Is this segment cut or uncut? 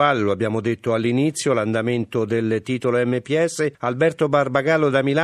cut